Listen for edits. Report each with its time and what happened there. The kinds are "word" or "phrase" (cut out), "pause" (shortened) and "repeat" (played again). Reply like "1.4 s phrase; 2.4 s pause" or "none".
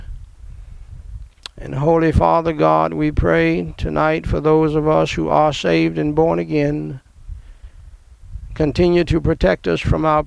none